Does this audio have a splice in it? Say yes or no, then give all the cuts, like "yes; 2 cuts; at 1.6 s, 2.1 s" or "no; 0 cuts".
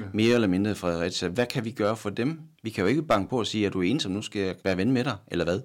yes; 2 cuts; at 2.5 s, 4.6 s